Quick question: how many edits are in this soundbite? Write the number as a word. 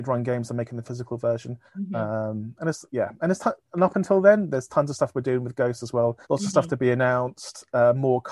three